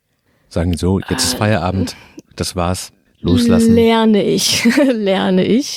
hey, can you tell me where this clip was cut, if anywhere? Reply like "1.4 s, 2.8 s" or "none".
2.2 s, 3.1 s